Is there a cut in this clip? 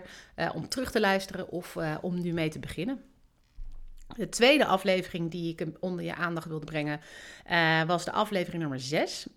no; 0 cuts

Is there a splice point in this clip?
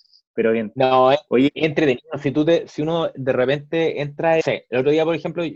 yes; 1 cut; at 4.4 s

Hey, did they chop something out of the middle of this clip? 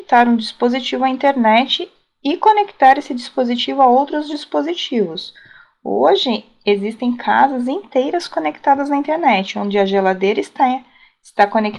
no; 0 cuts

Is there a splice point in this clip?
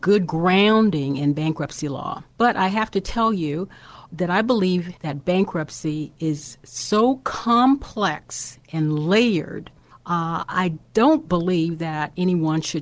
yes; 3 cuts; at 2.3 s, 5.0 s, 9.9 s

